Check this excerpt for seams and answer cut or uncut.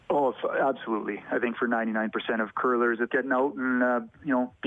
cut